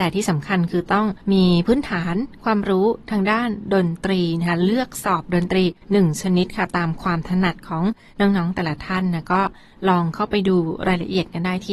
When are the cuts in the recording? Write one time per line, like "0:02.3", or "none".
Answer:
0:01.2
0:05.8

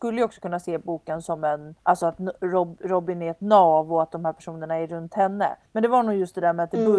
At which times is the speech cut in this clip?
0:01.8
0:05.7

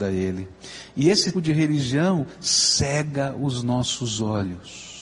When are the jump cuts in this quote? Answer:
0:01.3

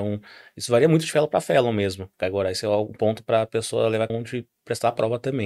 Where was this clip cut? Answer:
0:02.1
0:04.1

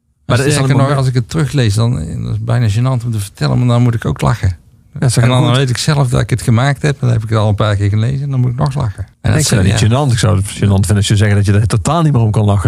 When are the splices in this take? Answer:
0:09.1

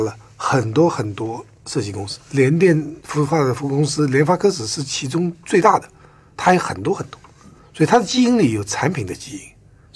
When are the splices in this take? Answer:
0:03.0

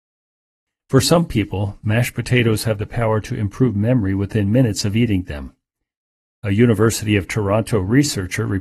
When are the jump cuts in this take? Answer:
none

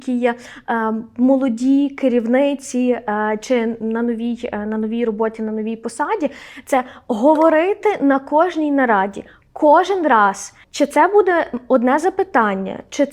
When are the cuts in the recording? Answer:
0:10.6

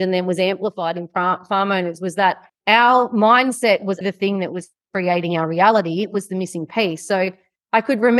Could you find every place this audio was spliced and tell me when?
0:02.5
0:04.0

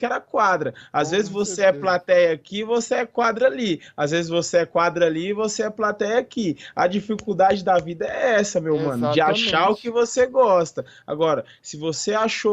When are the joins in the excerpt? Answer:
none

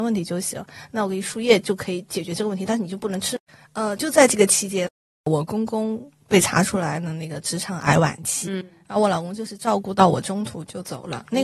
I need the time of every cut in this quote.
none

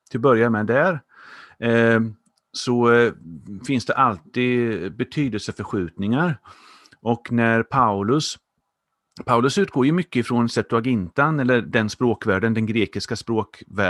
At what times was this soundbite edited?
none

